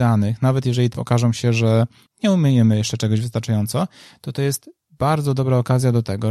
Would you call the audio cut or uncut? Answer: cut